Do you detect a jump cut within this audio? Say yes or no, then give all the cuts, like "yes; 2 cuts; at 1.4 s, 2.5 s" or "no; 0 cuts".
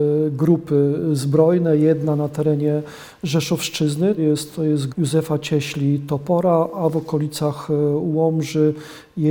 yes; 2 cuts; at 4.2 s, 4.9 s